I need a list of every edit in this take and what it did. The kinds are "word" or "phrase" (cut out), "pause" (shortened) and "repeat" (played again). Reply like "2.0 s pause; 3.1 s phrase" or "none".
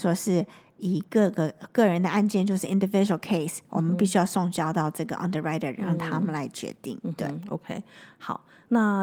none